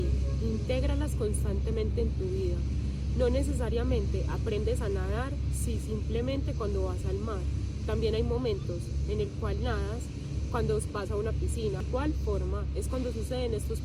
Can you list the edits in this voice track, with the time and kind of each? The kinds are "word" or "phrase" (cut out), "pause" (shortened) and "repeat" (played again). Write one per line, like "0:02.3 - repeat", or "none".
none